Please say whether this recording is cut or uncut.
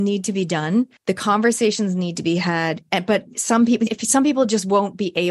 cut